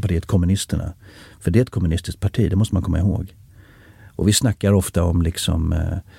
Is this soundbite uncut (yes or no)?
yes